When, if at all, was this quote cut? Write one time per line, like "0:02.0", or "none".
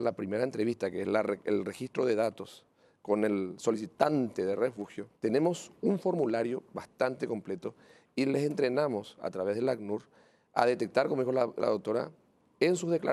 0:05.2